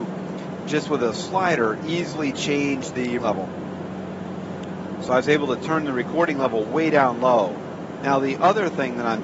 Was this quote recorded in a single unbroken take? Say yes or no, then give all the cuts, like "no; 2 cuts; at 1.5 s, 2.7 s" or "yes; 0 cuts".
no; 1 cut; at 3.2 s